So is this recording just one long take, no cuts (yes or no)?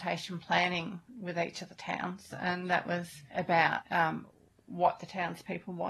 yes